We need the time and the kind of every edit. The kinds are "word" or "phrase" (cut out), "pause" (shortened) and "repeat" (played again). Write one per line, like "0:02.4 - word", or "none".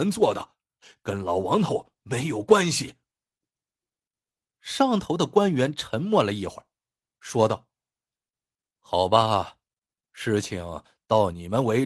none